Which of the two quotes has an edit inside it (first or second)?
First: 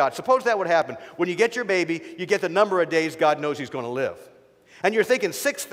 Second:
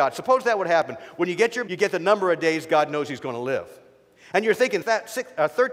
second